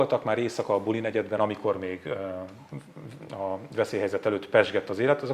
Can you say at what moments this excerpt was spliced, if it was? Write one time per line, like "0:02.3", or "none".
none